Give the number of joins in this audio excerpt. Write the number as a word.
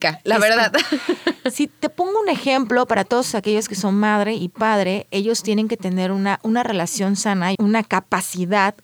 one